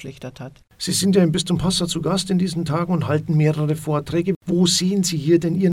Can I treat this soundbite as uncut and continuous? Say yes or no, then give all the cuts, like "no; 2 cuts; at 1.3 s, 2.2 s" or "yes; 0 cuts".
yes; 0 cuts